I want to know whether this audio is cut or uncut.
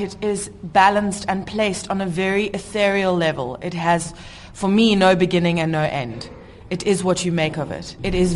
uncut